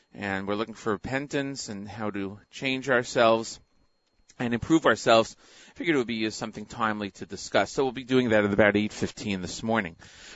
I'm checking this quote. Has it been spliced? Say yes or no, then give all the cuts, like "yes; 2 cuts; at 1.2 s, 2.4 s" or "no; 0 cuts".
no; 0 cuts